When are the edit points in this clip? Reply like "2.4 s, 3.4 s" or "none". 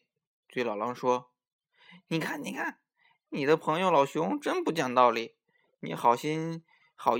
none